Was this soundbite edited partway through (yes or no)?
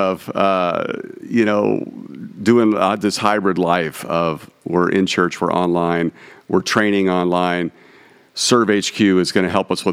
no